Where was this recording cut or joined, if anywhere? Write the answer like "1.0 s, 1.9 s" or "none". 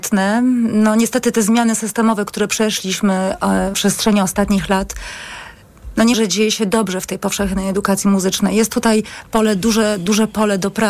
3.7 s, 6.1 s